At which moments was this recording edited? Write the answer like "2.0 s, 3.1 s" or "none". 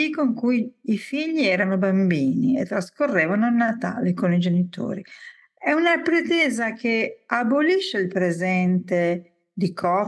none